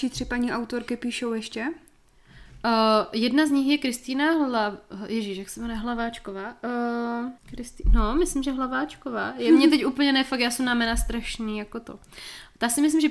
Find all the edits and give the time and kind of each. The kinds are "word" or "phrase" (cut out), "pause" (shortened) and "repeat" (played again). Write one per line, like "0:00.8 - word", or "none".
0:07.4 - pause